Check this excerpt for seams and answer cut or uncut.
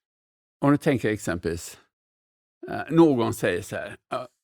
uncut